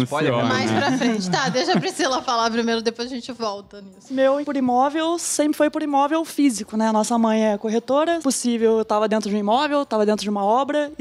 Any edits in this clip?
yes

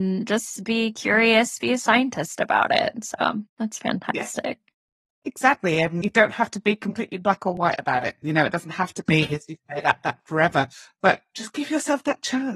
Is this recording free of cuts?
yes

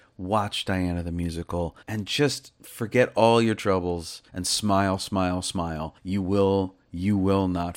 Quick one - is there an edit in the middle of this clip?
yes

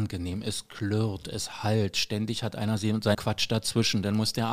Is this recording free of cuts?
no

